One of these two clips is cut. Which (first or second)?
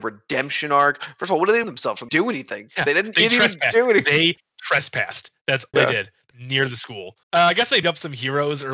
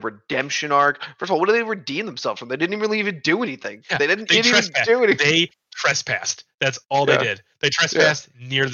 first